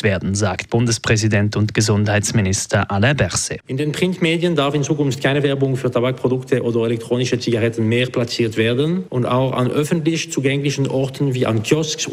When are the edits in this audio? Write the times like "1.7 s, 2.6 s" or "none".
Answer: none